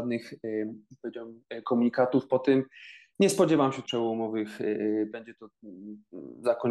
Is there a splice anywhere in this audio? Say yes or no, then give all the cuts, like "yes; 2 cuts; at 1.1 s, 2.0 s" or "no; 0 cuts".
yes; 2 cuts; at 3.8 s, 5.1 s